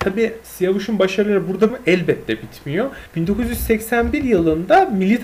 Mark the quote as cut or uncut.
cut